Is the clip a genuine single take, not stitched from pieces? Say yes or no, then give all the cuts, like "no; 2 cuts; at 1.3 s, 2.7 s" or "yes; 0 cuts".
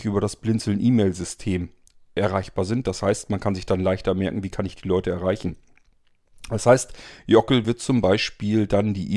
yes; 0 cuts